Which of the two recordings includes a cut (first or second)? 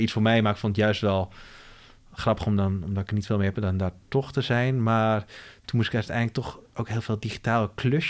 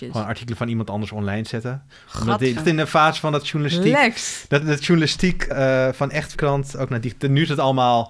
second